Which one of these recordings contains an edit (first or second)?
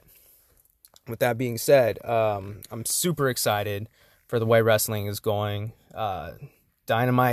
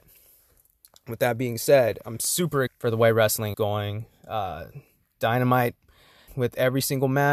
second